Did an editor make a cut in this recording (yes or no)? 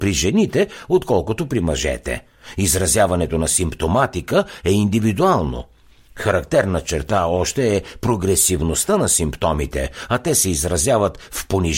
no